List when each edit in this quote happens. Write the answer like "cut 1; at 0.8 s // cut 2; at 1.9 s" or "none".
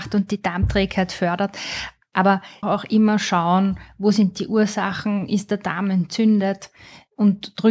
cut 1; at 2.6 s